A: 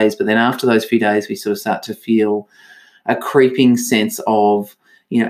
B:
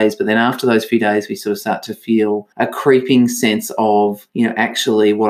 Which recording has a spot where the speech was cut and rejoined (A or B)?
B